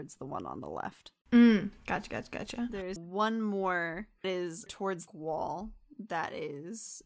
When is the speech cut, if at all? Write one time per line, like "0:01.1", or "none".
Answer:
0:03.0
0:04.2
0:04.7
0:05.1

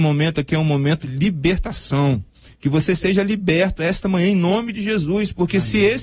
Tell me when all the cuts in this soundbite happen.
0:01.0

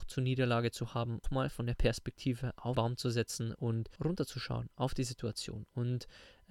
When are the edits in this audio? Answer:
0:01.2
0:02.7
0:04.0

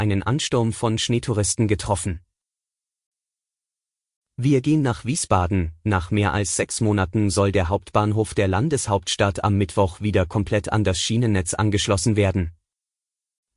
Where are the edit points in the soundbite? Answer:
none

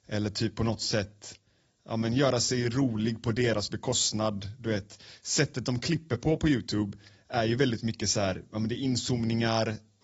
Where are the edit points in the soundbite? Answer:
none

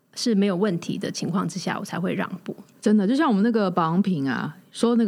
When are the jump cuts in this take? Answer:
none

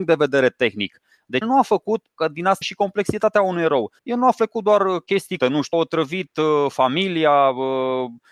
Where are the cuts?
0:01.4
0:02.6
0:04.0
0:05.4
0:05.7

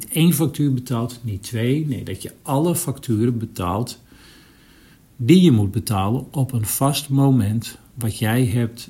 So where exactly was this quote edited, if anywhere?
none

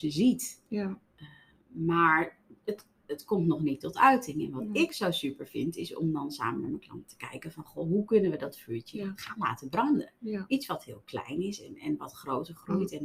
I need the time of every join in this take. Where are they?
none

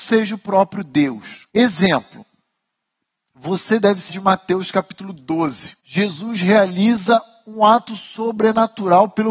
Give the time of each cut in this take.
0:01.5
0:04.1
0:05.8

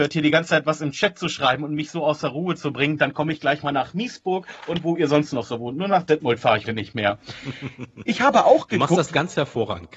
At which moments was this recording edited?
0:06.6

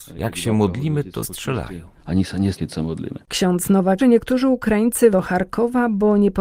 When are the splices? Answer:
0:01.2
0:02.5
0:04.0
0:05.1

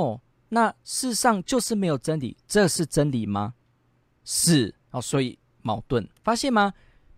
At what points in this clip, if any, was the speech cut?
0:02.4
0:03.6
0:04.8
0:06.2

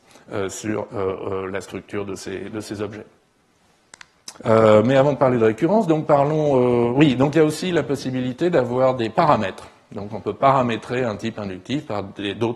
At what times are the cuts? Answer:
0:04.4

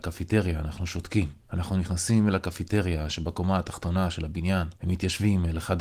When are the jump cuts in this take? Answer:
0:01.4
0:04.8

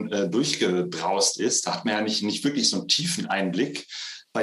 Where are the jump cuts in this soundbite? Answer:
none

